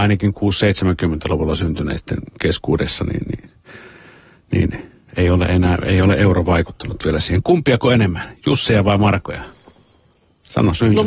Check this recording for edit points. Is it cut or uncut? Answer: uncut